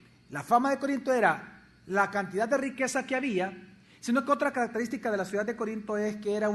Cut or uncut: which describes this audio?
uncut